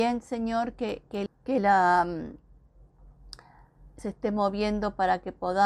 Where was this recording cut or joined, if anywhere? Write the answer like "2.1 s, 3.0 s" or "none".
1.3 s, 4.0 s